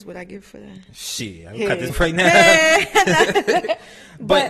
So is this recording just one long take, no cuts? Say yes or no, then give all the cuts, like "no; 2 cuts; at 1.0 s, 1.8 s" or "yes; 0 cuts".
no; 1 cut; at 1.9 s